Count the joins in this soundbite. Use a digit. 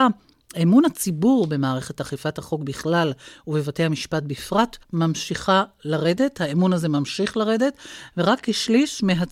1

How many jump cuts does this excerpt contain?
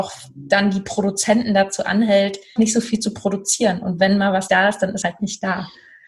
3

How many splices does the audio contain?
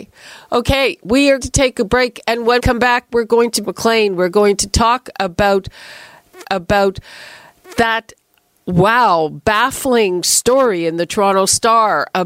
4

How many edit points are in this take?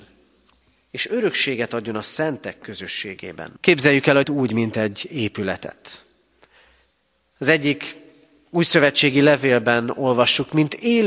2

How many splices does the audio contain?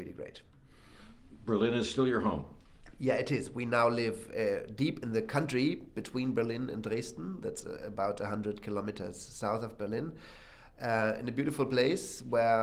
0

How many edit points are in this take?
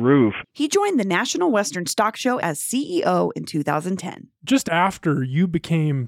1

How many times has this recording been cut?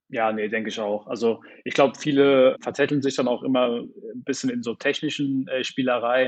0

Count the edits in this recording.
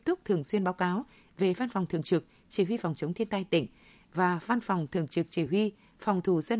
0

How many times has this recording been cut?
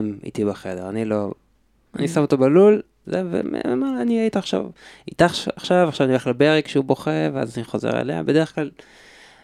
0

